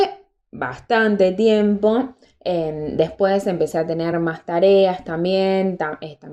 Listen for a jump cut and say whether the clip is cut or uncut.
uncut